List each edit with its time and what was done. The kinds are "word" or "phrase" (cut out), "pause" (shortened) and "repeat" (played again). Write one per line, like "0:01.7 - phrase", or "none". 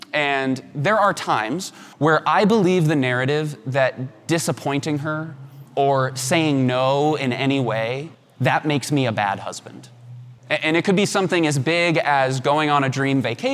0:01.9 - pause
0:05.7 - pause
0:08.1 - pause
0:10.4 - pause